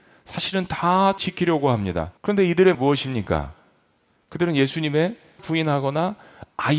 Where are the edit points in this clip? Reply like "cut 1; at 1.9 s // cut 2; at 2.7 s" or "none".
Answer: cut 1; at 1.2 s // cut 2; at 2.2 s // cut 3; at 2.7 s // cut 4; at 5.4 s